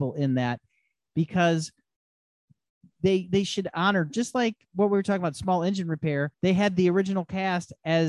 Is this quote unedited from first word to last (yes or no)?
no